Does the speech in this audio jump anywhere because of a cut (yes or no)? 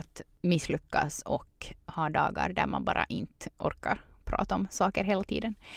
no